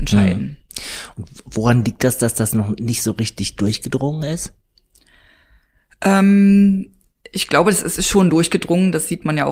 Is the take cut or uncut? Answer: uncut